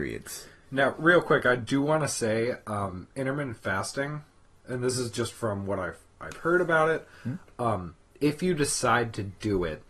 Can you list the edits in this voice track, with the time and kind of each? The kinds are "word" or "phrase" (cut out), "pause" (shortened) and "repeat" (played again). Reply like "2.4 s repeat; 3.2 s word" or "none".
none